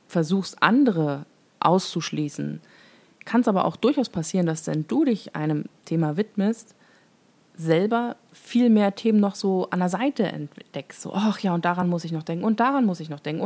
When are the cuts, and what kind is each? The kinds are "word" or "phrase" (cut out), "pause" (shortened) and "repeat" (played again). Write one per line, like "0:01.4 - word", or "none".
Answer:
none